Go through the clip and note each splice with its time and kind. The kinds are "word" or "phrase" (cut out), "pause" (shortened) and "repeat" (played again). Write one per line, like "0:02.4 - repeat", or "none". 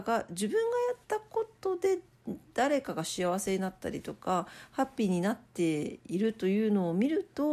0:01.0 - pause